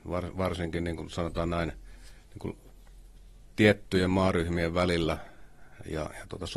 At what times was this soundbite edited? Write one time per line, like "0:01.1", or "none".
none